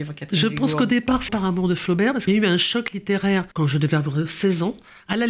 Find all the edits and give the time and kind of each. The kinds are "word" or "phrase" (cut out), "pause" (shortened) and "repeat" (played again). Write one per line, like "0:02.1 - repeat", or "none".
0:01.3 - word
0:02.3 - word
0:03.5 - pause